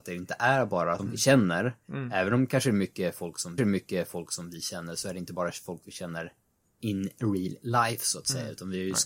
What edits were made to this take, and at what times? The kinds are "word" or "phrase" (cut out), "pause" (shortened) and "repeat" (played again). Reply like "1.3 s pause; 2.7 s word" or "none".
1.0 s phrase; 3.6 s repeat